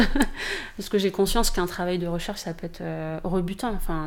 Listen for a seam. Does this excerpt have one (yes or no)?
no